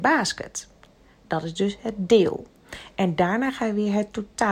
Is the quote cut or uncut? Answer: uncut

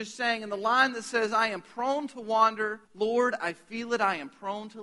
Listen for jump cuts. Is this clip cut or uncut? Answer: cut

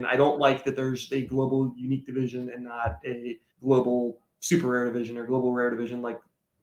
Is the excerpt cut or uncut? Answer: cut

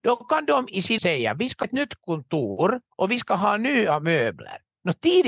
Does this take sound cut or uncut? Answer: cut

